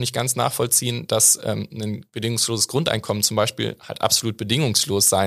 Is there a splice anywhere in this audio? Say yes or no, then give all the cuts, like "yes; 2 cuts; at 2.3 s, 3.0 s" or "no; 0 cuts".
no; 0 cuts